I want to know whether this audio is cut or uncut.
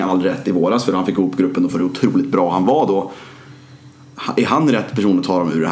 uncut